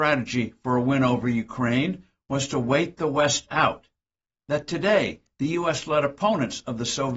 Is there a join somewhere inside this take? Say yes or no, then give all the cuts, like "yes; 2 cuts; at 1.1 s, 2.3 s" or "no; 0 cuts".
no; 0 cuts